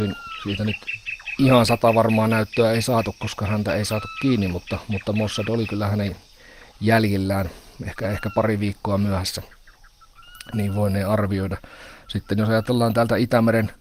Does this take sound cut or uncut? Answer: uncut